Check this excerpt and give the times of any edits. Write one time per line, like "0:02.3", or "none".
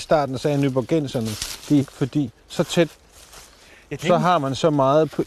0:01.8
0:02.4
0:02.9